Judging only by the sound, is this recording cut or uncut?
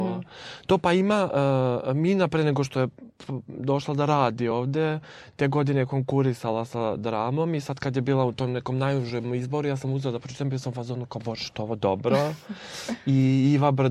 uncut